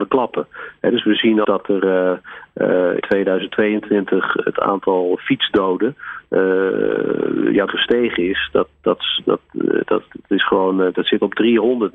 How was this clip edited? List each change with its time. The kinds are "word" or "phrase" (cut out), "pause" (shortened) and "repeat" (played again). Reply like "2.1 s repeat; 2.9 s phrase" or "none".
1.4 s word; 3.0 s word; 7.7 s word